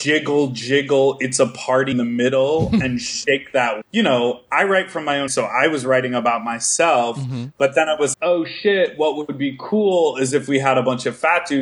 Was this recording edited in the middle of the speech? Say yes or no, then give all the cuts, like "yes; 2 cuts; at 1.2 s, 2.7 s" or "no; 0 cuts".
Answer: yes; 4 cuts; at 1.9 s, 3.8 s, 5.3 s, 8.1 s